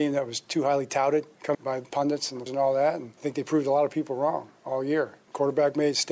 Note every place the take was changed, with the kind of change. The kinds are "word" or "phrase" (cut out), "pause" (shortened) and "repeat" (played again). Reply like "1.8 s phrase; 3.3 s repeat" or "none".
1.5 s phrase; 2.5 s word